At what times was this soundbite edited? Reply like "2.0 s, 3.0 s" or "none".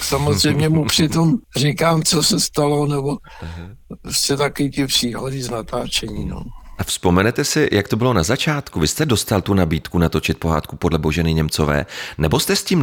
1.4 s